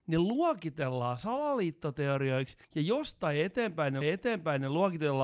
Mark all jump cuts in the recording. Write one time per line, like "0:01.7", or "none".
0:02.6
0:04.0